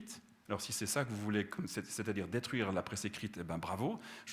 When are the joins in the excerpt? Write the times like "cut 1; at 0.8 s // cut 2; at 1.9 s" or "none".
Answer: none